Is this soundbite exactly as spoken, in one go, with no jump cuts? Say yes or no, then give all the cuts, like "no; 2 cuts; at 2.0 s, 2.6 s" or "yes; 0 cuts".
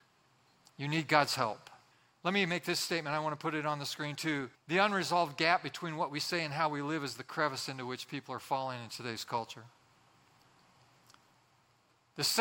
no; 2 cuts; at 1.9 s, 4.5 s